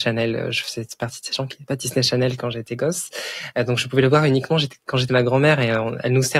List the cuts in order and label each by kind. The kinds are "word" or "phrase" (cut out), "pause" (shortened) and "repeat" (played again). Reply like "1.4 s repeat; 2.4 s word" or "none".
5.1 s word